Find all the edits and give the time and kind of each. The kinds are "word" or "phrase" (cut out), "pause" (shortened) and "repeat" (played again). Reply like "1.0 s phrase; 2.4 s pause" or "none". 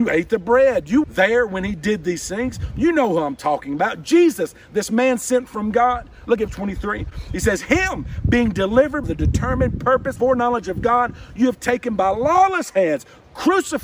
1.0 s word; 6.5 s word; 9.0 s word; 10.2 s word